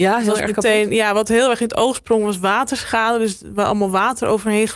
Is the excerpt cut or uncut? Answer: uncut